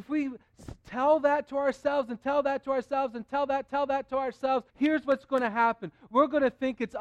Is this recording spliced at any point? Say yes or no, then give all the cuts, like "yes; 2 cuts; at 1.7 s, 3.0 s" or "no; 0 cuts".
yes; 2 cuts; at 3.7 s, 4.7 s